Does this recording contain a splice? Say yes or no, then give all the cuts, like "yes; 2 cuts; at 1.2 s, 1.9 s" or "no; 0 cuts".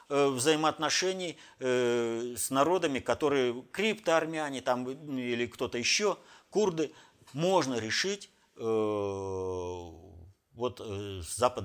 no; 0 cuts